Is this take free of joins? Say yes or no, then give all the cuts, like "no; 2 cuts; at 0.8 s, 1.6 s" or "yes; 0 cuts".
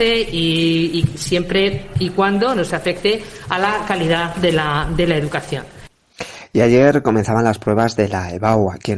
yes; 0 cuts